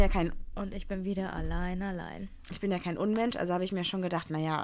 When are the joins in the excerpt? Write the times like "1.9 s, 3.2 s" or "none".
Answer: none